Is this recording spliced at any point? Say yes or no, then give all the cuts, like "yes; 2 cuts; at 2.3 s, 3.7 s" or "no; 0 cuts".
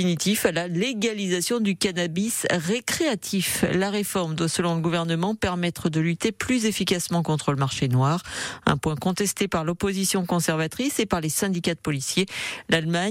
no; 0 cuts